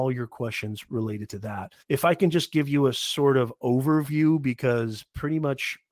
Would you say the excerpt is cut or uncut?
cut